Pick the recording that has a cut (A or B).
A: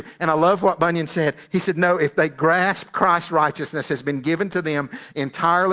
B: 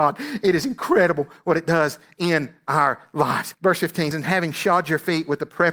B